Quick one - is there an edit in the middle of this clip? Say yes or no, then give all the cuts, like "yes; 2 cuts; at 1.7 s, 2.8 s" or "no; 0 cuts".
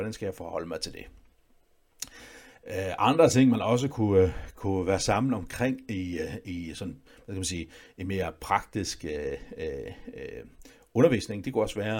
no; 0 cuts